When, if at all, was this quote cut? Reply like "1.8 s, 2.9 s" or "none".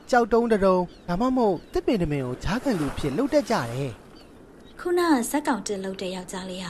4.7 s